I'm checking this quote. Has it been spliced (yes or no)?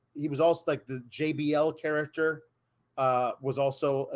no